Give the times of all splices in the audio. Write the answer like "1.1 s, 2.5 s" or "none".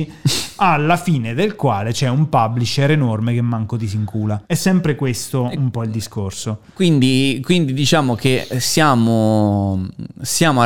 4.4 s